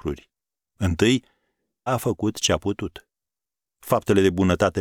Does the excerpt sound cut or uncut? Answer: cut